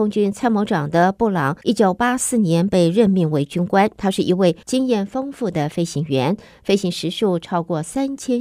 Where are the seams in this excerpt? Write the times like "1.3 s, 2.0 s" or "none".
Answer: 1.6 s, 4.6 s